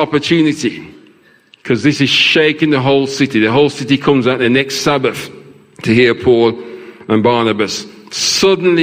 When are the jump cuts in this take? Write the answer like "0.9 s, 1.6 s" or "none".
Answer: none